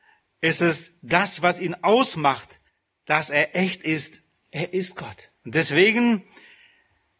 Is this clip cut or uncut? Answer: cut